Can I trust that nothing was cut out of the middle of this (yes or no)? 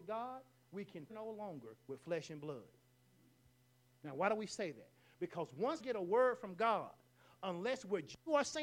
no